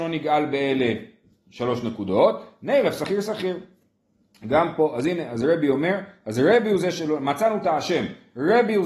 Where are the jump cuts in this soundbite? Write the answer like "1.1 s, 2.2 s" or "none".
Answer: none

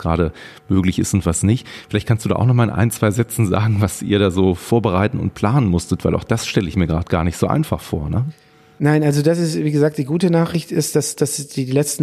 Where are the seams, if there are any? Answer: none

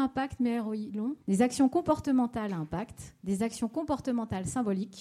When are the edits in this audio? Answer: 1.2 s, 3.2 s

